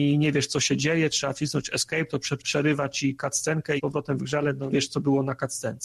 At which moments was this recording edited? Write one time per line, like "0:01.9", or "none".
0:02.4
0:03.8
0:04.7

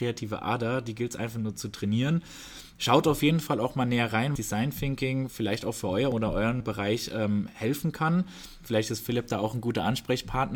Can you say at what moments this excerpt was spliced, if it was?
0:04.4
0:06.1
0:06.6

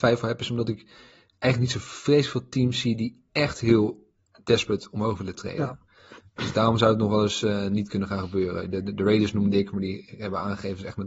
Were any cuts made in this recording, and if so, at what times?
none

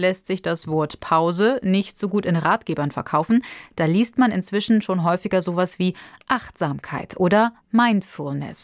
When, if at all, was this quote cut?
0:07.6

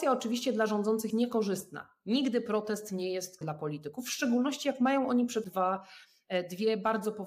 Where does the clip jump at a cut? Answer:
0:01.1
0:03.4
0:05.4

